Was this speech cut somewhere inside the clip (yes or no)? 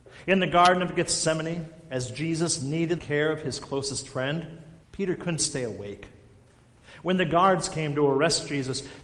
yes